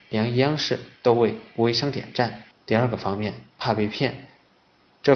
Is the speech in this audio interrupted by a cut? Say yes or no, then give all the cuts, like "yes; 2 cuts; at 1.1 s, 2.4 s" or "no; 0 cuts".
yes; 1 cut; at 2.5 s